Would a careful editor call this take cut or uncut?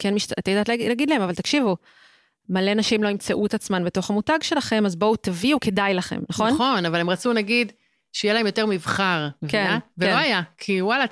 cut